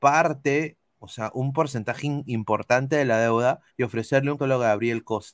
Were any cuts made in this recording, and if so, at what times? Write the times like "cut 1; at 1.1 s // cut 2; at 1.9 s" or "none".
cut 1; at 3.7 s // cut 2; at 4.4 s